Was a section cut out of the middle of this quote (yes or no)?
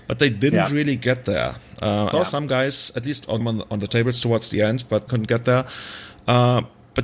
yes